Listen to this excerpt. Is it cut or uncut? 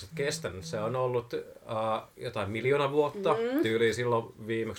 uncut